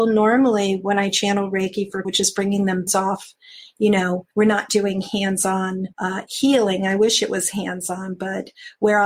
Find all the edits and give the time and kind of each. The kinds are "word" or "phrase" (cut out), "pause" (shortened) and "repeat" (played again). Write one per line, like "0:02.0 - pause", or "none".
0:02.0 - word
0:02.9 - phrase
0:04.3 - pause
0:05.9 - pause